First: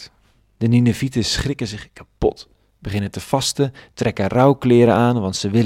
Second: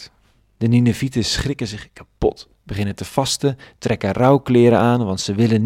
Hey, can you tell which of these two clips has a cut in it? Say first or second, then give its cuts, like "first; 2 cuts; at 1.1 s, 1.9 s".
second; 1 cut; at 2.5 s